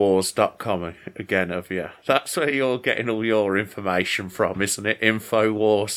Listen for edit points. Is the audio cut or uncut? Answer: uncut